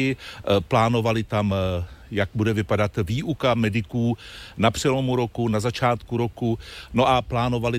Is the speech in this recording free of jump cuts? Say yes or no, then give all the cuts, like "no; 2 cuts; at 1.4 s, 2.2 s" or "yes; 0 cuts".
yes; 0 cuts